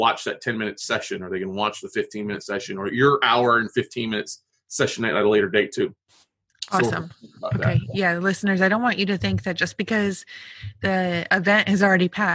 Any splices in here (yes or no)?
no